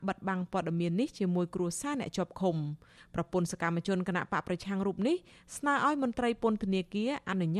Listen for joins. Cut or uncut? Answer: uncut